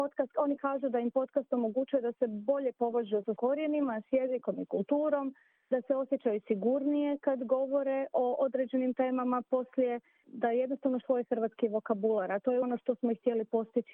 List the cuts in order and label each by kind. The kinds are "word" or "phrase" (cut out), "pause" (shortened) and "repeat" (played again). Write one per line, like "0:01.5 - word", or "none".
0:03.4 - word
0:10.2 - word
0:11.0 - word
0:12.6 - word